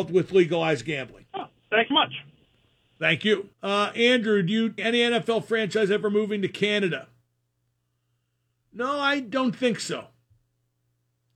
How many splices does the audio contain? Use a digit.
4